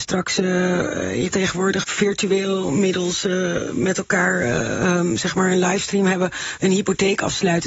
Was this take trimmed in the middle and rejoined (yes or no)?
yes